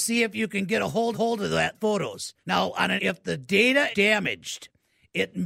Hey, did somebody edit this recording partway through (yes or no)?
yes